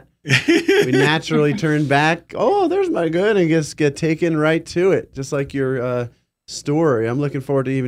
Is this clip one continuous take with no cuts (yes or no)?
yes